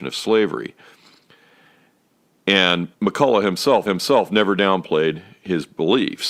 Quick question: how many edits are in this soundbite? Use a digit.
2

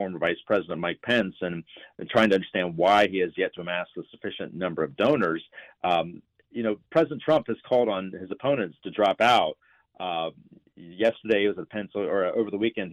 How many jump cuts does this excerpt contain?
0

